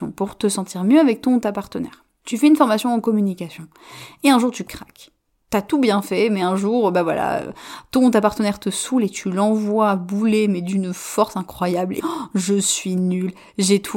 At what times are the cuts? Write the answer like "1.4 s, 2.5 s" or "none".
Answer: 5.2 s, 12.0 s